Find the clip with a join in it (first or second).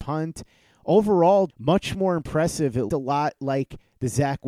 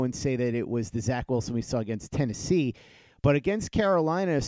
first